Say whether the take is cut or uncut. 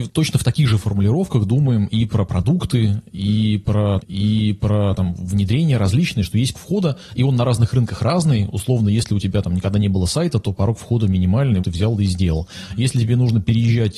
cut